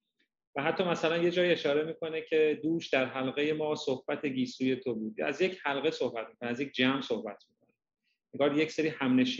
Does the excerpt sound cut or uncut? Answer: uncut